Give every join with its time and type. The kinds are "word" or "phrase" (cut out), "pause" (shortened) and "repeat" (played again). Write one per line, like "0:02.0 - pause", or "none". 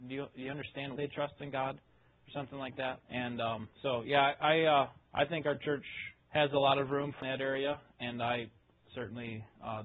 0:01.0 - word
0:03.0 - pause
0:03.7 - pause
0:05.0 - pause
0:06.2 - pause
0:07.2 - phrase